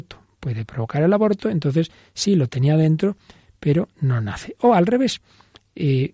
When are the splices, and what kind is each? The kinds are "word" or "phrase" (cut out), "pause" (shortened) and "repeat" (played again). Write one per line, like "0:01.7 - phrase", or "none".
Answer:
none